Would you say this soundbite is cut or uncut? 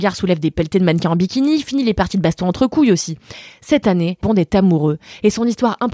cut